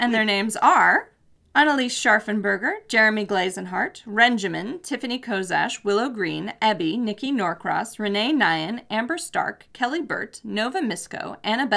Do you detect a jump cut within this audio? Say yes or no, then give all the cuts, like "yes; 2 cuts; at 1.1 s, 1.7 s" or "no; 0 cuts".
no; 0 cuts